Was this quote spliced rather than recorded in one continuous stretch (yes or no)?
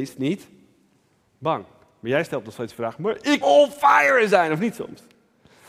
yes